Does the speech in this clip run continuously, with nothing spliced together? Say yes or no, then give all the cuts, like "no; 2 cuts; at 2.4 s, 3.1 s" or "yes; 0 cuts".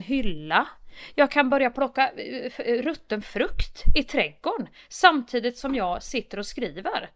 yes; 0 cuts